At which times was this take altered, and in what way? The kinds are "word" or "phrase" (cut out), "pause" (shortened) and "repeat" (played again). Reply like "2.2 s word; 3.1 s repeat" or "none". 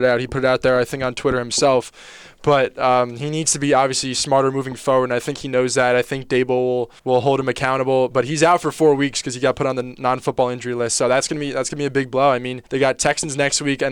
7.0 s pause; 12.7 s pause